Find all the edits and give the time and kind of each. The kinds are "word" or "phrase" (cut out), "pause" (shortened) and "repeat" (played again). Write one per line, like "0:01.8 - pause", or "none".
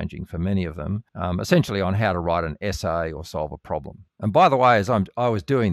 0:01.1 - pause
0:04.1 - pause